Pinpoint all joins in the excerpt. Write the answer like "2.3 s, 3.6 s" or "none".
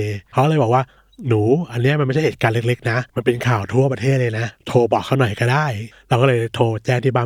3.1 s